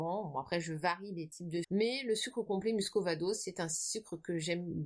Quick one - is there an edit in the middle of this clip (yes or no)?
yes